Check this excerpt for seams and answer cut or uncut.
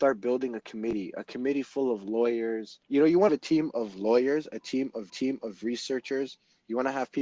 cut